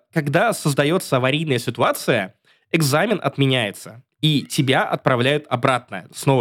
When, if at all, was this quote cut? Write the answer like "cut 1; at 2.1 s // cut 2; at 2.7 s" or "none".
none